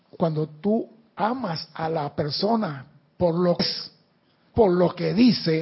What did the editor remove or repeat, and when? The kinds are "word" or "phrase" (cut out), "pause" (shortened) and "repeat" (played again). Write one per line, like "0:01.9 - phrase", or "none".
0:03.6 - word
0:04.5 - word